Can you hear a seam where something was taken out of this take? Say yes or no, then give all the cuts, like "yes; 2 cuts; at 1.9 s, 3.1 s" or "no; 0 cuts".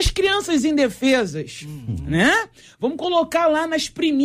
no; 0 cuts